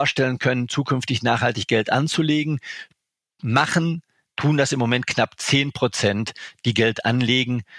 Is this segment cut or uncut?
uncut